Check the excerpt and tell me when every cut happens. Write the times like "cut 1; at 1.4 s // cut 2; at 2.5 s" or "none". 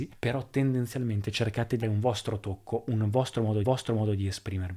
cut 1; at 1.8 s // cut 2; at 3.6 s